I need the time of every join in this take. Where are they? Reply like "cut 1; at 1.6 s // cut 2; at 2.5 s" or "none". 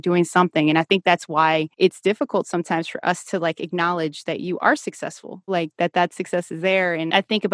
cut 1; at 5.5 s